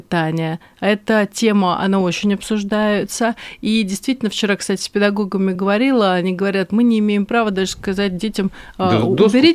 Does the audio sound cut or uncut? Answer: uncut